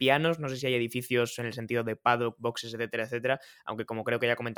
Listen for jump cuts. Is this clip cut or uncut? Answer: uncut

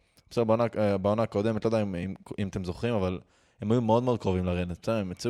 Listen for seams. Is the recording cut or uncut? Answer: uncut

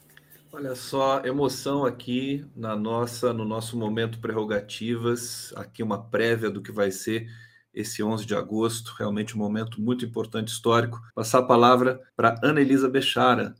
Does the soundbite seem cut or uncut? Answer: cut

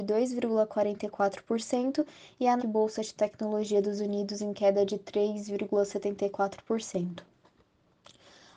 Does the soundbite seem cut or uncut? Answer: cut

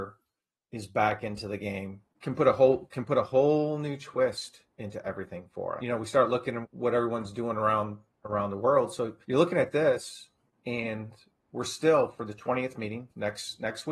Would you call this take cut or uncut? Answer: cut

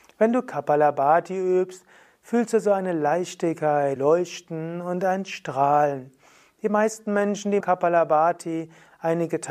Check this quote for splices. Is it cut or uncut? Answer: cut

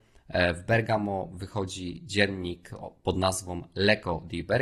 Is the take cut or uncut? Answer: uncut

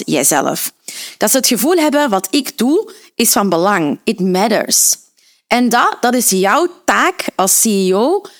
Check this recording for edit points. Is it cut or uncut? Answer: uncut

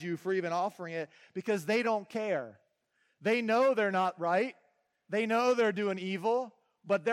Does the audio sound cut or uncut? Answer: uncut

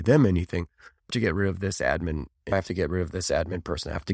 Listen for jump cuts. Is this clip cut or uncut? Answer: cut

